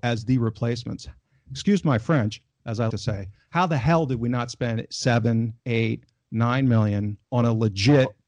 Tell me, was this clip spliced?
yes; 3 cuts; at 2.9 s, 5.6 s, 7.2 s

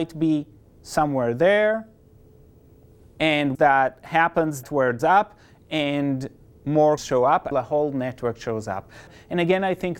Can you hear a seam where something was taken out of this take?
yes; 5 cuts; at 3.5 s, 4.6 s, 5.0 s, 7.0 s, 7.5 s

